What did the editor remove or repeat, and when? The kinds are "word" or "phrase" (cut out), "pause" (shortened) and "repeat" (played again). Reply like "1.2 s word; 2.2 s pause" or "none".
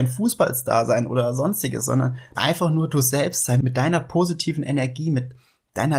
2.4 s phrase